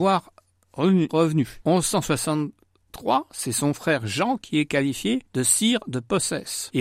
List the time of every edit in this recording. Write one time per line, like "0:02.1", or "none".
0:01.1